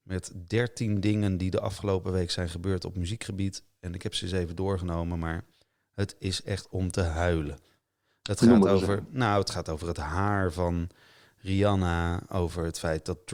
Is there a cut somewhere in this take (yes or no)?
no